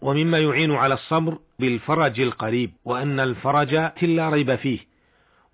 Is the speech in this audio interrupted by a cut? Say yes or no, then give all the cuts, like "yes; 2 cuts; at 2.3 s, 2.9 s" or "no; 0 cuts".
yes; 3 cuts; at 1.6 s, 2.8 s, 4.0 s